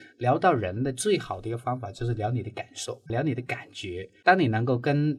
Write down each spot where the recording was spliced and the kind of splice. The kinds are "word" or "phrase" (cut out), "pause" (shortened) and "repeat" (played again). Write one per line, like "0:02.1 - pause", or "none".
0:03.1 - word